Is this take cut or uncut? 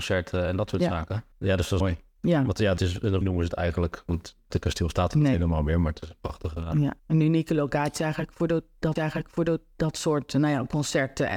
cut